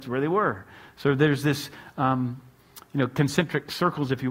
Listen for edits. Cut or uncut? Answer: uncut